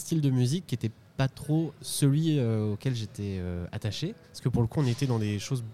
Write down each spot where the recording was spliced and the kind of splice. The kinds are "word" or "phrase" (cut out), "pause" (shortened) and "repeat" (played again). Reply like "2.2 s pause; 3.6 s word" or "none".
4.2 s pause